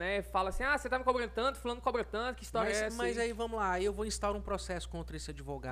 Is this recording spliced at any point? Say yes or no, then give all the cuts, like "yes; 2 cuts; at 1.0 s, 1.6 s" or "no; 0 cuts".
no; 0 cuts